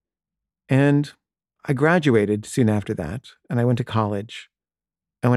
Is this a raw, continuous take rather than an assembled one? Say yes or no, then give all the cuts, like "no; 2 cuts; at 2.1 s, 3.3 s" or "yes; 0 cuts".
yes; 0 cuts